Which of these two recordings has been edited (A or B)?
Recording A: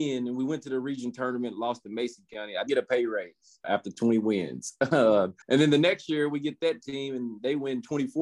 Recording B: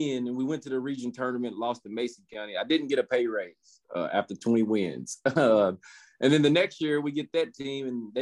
A